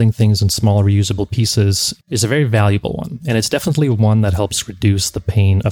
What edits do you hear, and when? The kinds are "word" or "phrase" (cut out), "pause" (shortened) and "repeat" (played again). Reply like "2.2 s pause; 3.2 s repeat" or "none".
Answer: 2.0 s pause